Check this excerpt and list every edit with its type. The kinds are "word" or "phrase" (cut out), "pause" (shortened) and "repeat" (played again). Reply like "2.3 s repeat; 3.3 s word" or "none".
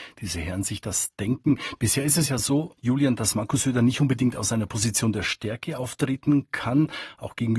none